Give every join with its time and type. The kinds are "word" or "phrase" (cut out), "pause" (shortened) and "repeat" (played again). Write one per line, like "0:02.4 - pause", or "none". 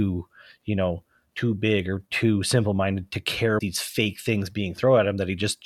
0:03.6 - word